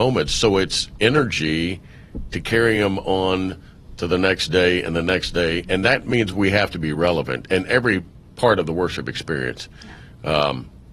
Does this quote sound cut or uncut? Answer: uncut